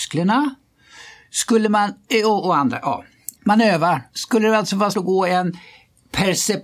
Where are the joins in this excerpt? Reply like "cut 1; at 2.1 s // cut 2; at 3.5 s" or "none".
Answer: cut 1; at 3.3 s // cut 2; at 4.1 s // cut 3; at 4.9 s

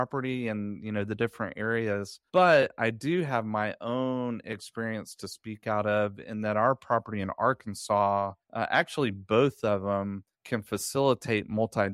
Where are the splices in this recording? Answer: cut 1; at 2.3 s // cut 2; at 8.4 s // cut 3; at 10.3 s

